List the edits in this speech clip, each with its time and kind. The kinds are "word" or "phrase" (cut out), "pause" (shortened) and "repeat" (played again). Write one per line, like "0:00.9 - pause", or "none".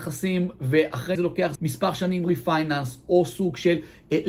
0:01.2 - phrase
0:01.6 - word
0:02.2 - phrase